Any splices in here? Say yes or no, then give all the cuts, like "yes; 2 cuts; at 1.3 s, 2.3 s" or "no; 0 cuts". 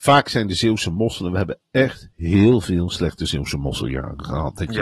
yes; 1 cut; at 2.1 s